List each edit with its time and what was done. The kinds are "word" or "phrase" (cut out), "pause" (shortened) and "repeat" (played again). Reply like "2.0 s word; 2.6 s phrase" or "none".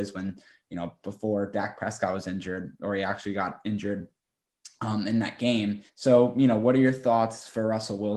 5.9 s pause